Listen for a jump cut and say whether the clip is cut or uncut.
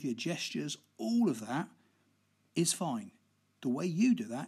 uncut